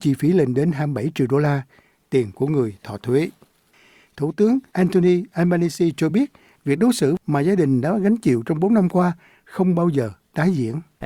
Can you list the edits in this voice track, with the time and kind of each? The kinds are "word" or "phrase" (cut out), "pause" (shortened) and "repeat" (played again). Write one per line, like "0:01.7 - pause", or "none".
none